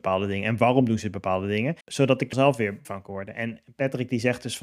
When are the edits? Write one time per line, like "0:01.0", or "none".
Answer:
0:01.8
0:02.3
0:02.8